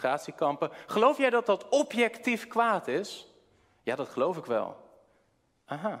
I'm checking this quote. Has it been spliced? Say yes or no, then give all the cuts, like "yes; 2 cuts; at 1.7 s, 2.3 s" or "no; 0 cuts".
no; 0 cuts